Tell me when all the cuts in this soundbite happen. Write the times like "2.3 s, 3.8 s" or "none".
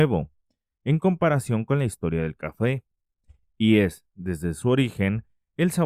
none